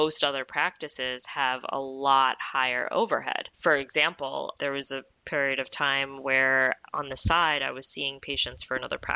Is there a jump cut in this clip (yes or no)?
yes